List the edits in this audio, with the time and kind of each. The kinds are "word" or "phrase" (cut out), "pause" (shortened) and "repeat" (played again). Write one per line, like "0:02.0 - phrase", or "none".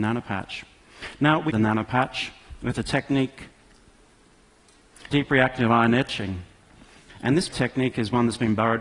0:01.5 - word
0:05.1 - word
0:07.5 - word